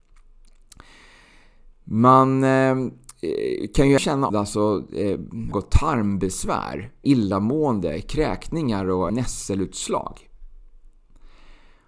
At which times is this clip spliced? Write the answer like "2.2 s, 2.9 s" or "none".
4.0 s, 4.3 s, 5.5 s, 7.0 s, 9.1 s